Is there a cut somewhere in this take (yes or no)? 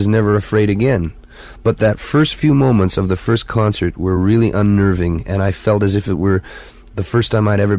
no